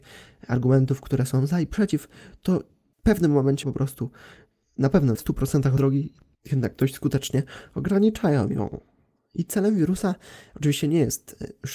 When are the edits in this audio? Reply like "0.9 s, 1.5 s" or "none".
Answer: 3.6 s, 5.1 s, 5.8 s